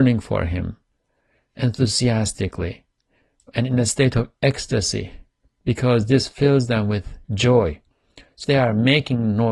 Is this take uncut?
no; 1 cut; at 8.4 s

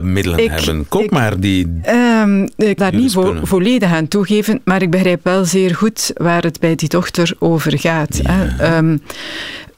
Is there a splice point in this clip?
yes; 1 cut; at 2.8 s

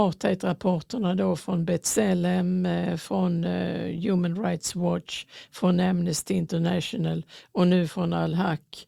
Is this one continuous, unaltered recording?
yes; 0 cuts

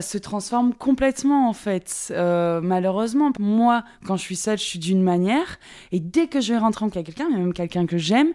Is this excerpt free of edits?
no; 2 cuts; at 3.4 s, 6.9 s

